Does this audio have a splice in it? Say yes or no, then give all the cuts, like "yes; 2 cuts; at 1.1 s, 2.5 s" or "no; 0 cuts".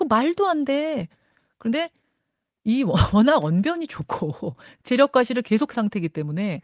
yes; 1 cut; at 5.7 s